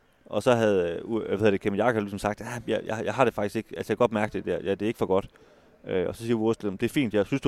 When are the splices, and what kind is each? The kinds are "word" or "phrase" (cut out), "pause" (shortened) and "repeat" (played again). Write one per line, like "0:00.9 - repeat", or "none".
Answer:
none